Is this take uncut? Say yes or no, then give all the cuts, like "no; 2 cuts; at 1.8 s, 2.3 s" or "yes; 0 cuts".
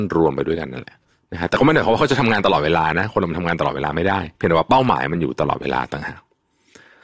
no; 1 cut; at 4.3 s